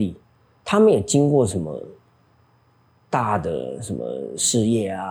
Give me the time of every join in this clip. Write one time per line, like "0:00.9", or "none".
none